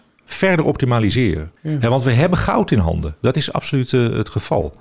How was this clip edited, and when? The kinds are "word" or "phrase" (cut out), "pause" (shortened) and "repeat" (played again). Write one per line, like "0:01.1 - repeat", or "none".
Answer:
0:01.6 - pause